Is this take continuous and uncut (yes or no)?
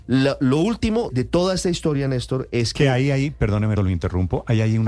no